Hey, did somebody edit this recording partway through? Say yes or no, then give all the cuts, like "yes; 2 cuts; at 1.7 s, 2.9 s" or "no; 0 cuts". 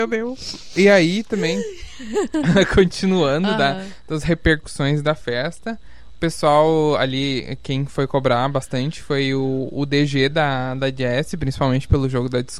no; 0 cuts